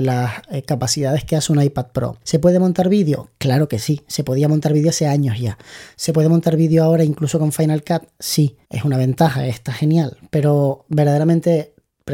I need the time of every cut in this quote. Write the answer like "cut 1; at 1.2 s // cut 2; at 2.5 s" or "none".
cut 1; at 2.2 s // cut 2; at 8.6 s